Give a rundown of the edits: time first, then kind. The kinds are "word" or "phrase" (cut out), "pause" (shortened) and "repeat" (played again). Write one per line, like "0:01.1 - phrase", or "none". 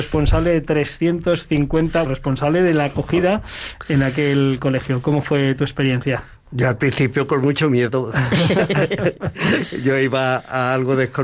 0:02.0 - word